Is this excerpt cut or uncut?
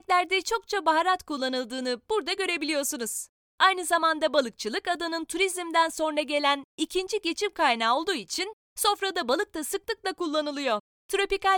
uncut